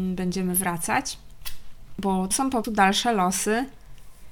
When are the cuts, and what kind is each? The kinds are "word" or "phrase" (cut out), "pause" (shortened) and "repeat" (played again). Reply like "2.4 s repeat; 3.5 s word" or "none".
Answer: 2.3 s word; 2.6 s word